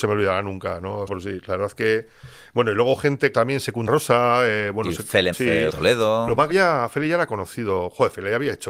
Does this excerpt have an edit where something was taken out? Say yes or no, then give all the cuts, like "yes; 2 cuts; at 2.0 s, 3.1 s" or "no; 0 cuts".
yes; 6 cuts; at 1.1 s, 3.3 s, 3.9 s, 5.3 s, 5.7 s, 6.5 s